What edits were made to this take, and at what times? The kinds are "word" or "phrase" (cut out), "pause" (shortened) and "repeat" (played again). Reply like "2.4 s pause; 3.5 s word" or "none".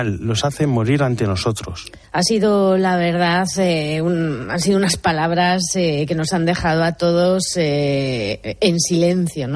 2.0 s pause